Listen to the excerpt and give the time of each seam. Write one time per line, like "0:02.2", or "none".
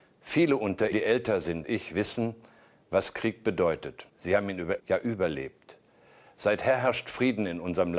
0:00.9
0:01.6
0:04.1
0:04.8